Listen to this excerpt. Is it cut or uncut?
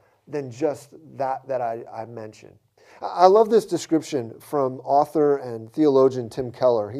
uncut